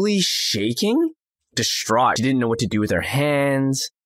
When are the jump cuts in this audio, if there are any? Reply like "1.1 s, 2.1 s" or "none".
1.4 s, 2.2 s